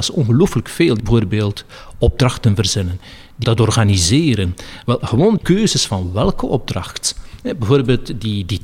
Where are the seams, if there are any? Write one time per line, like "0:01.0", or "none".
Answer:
0:01.0
0:03.4
0:05.4